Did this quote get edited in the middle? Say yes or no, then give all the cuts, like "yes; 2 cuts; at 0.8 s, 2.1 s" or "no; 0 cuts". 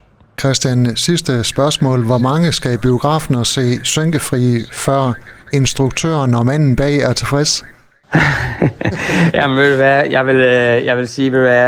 no; 0 cuts